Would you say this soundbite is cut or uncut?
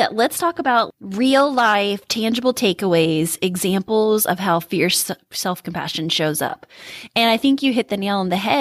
uncut